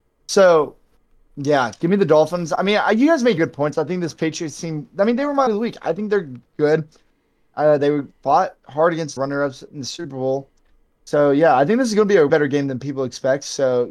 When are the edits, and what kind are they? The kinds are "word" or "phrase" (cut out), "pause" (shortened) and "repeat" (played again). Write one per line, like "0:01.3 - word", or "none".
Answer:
0:03.4 - word
0:05.5 - word
0:09.2 - word
0:12.3 - word